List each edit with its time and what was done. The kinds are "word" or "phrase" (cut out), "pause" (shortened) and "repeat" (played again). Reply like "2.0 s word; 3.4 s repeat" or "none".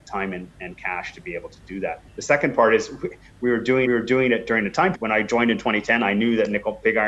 2.1 s pause; 3.9 s repeat; 4.9 s phrase